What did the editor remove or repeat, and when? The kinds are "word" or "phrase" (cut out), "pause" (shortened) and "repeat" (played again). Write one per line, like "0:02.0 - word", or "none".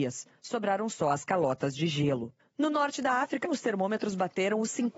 none